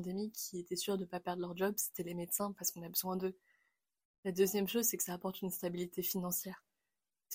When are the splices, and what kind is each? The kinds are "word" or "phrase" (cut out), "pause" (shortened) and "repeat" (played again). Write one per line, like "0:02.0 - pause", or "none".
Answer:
none